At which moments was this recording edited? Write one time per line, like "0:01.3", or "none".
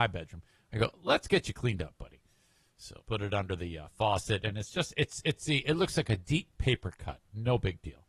0:03.0